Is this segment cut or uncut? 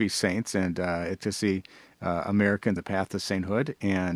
cut